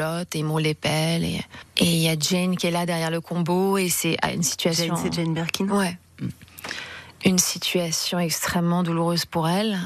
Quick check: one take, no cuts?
yes; 0 cuts

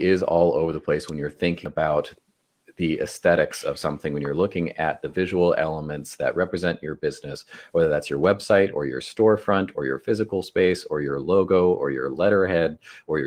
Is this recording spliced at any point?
no; 0 cuts

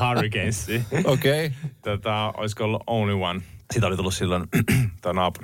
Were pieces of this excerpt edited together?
yes; 1 cut; at 3.6 s

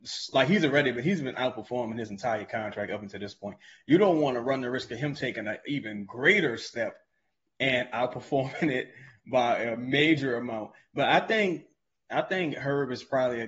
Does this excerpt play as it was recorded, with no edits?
yes; 0 cuts

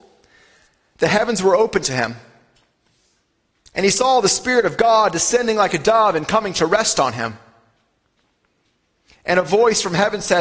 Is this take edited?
no; 0 cuts

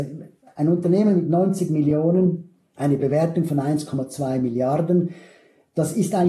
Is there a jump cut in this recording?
no; 0 cuts

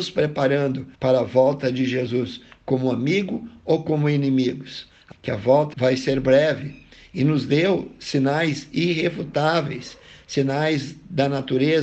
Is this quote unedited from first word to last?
no; 3 cuts; at 0.9 s, 5.1 s, 5.7 s

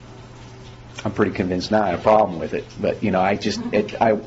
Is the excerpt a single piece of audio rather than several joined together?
yes; 0 cuts

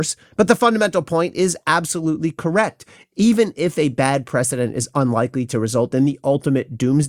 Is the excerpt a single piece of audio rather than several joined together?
yes; 0 cuts

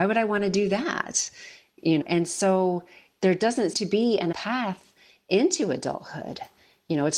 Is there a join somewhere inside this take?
yes; 3 cuts; at 2.0 s, 3.7 s, 4.3 s

